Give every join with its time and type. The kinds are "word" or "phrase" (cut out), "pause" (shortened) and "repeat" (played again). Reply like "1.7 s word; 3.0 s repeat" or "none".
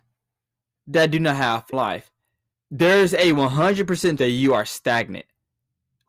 1.7 s phrase; 2.5 s pause; 4.2 s word